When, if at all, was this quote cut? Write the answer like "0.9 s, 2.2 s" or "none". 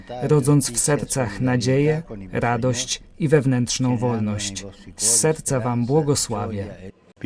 none